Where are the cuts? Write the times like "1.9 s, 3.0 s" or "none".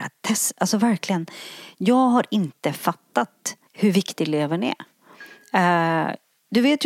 3.7 s